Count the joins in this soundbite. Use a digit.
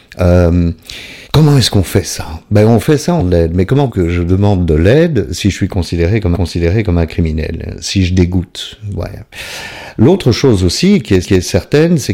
5